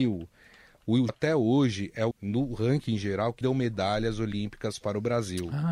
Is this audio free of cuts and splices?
no; 3 cuts; at 1.1 s, 2.1 s, 3.4 s

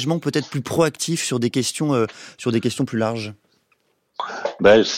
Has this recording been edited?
no; 0 cuts

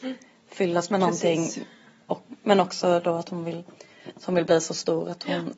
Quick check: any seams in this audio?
no; 0 cuts

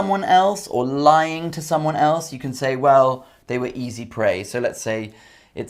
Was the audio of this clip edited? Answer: no; 0 cuts

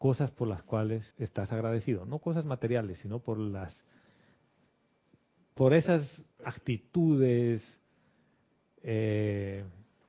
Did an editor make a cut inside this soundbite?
yes; 2 cuts; at 1.1 s, 6.3 s

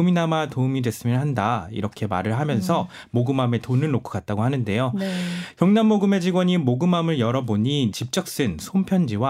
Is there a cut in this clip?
yes; 1 cut; at 7.9 s

